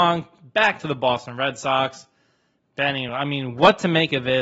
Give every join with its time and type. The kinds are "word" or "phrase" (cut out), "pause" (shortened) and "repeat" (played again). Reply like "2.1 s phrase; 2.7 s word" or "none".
none